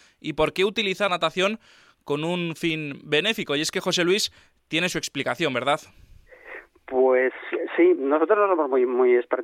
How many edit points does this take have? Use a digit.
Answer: 2